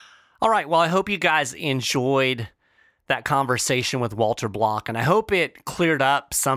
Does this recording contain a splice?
no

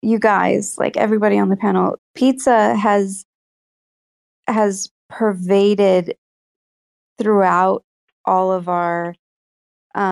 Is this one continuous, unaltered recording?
no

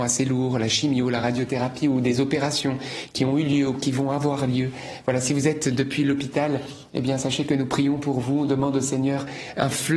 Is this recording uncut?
yes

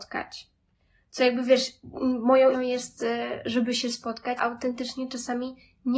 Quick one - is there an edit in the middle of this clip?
yes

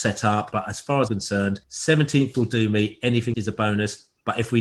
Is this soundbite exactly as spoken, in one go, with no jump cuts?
no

